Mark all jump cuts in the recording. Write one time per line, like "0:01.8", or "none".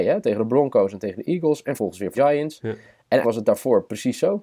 0:01.8
0:02.1
0:03.2